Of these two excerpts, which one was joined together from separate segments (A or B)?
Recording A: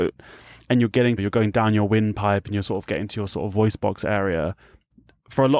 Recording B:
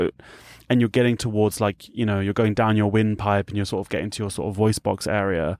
A